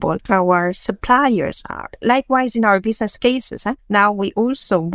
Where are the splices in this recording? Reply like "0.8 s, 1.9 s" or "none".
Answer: 3.8 s